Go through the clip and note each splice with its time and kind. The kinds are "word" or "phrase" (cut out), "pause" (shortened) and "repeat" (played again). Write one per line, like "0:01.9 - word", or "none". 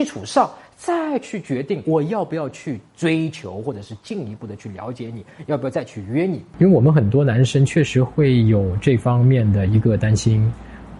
0:01.8 - word